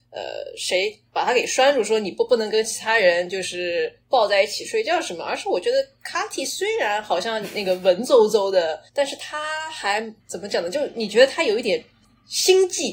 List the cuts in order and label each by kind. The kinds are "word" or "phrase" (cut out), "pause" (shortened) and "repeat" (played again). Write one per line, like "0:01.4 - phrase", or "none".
0:08.9 - pause
0:10.2 - pause